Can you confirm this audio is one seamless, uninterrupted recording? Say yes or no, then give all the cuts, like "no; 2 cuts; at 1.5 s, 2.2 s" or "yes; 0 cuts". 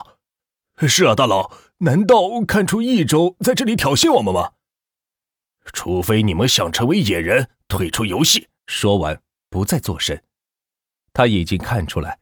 no; 1 cut; at 8.6 s